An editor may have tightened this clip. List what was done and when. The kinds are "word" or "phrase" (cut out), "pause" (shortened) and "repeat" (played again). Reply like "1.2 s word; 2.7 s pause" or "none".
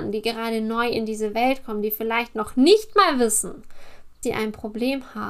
4.2 s word